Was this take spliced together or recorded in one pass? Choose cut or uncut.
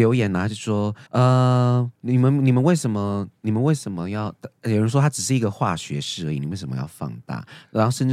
cut